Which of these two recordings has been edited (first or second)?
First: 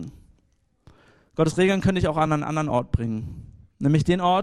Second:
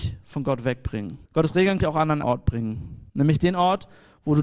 second